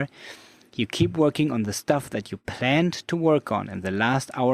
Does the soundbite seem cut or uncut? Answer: uncut